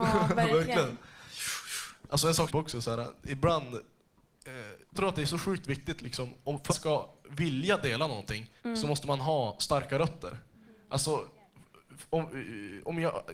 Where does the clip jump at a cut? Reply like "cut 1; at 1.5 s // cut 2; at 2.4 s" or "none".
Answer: cut 1; at 2.5 s // cut 2; at 4.9 s // cut 3; at 6.7 s // cut 4; at 8.6 s